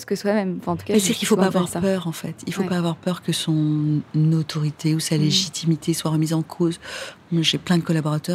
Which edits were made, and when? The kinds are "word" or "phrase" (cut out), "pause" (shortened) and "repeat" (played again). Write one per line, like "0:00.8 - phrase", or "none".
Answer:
none